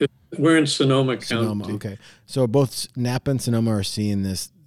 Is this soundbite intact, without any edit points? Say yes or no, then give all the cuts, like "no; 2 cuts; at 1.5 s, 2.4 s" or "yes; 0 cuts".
yes; 0 cuts